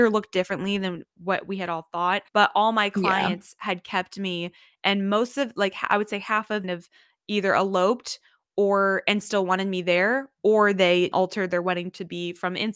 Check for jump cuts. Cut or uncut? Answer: cut